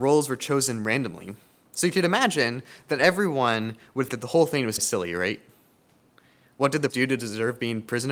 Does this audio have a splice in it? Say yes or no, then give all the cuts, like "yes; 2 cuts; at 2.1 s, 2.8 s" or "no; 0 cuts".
yes; 3 cuts; at 4.1 s, 4.8 s, 6.9 s